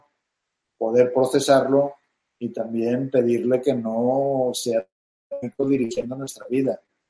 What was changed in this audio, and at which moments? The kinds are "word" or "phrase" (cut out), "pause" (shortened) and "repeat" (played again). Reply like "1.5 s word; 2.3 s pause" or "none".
none